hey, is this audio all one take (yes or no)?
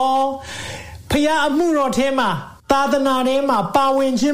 no